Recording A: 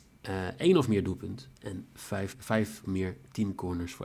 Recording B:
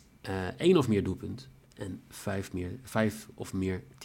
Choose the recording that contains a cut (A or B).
A